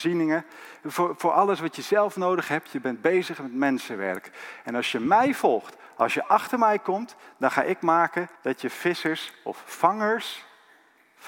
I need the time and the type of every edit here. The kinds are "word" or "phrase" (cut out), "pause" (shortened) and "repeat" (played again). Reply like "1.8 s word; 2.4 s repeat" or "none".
8.4 s pause

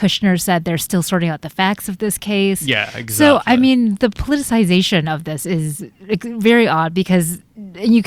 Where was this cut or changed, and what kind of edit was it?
none

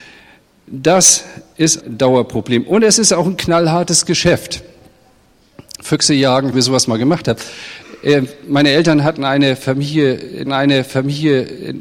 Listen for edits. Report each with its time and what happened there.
1.8 s word; 6.5 s phrase; 10.4 s repeat

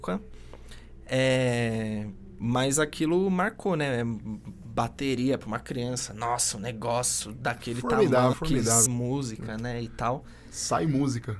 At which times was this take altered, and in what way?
8.3 s word; 8.9 s word

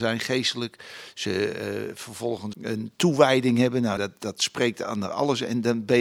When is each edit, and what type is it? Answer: 2.5 s word; 4.0 s word

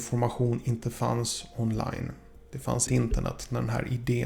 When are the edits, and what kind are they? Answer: 2.9 s word

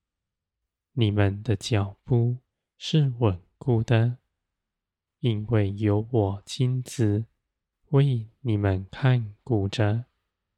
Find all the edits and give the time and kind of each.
2.5 s pause

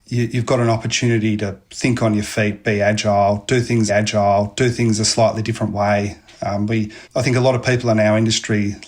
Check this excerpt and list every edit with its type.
3.9 s repeat; 7.0 s pause

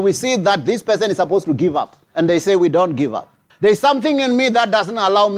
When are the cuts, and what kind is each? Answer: 2.0 s pause; 3.5 s pause

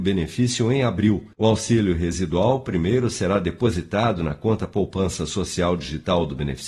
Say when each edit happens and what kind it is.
1.3 s pause

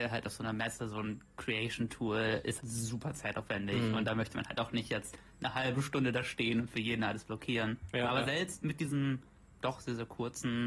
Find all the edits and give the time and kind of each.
2.6 s word

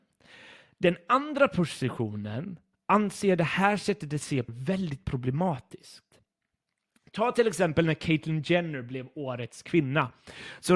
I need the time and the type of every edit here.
4.5 s word

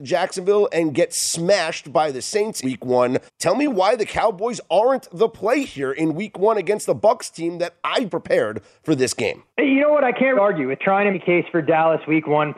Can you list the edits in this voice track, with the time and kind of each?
2.6 s word; 3.3 s pause; 8.1 s phrase; 9.5 s pause; 10.4 s word; 11.1 s word

